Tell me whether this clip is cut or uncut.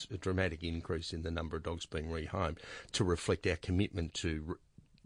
uncut